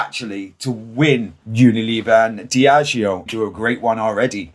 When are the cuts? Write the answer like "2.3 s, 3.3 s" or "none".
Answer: 1.4 s, 3.3 s